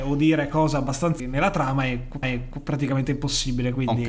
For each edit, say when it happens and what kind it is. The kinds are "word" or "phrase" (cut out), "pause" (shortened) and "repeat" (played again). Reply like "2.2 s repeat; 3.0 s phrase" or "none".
1.2 s word; 2.2 s repeat